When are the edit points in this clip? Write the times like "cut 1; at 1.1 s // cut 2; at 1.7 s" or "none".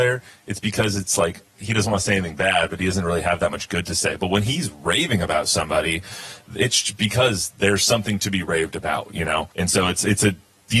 cut 1; at 9.5 s